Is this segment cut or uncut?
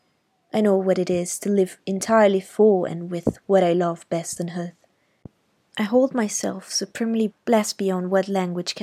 cut